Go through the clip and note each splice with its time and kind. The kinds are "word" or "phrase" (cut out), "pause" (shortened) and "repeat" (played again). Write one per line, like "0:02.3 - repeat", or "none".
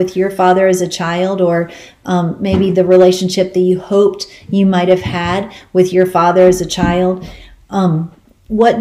none